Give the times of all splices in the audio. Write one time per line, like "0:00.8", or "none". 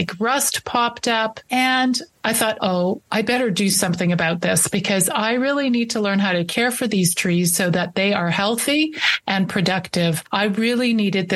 0:02.6